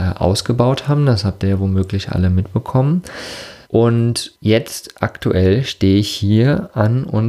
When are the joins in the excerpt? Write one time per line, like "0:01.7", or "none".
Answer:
0:03.6